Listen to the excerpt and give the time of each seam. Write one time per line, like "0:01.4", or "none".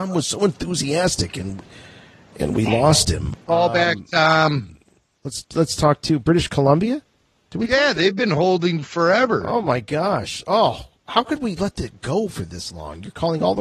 none